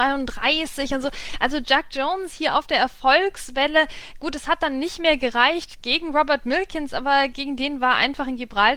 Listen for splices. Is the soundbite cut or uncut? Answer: uncut